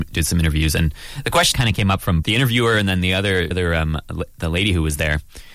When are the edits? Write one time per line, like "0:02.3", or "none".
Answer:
0:01.5
0:02.2
0:03.5

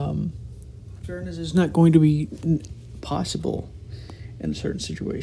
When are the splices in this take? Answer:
0:01.0

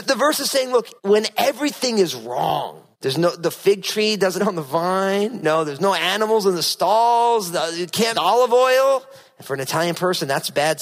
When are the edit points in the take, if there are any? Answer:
0:01.0
0:02.9
0:04.4
0:05.4
0:05.8
0:08.1

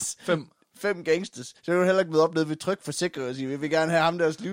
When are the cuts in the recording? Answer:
0:01.6

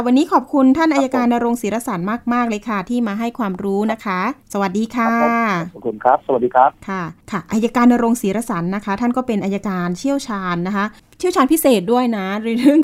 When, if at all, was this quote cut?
0:04.4
0:07.2
0:11.0

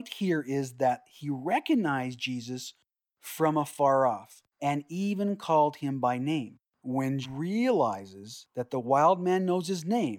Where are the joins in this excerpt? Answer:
0:04.5
0:07.2

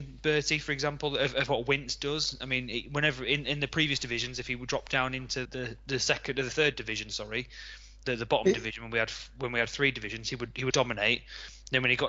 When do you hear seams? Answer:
0:05.4
0:10.7

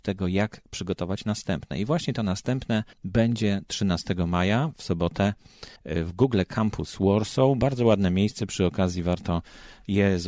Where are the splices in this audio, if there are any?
0:02.9
0:05.8

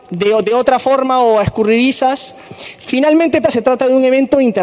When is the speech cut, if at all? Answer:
0:03.4

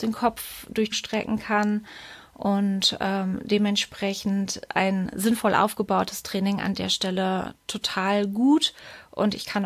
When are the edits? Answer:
0:00.9
0:04.7

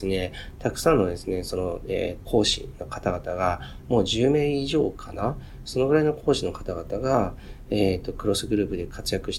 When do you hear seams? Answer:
0:02.2

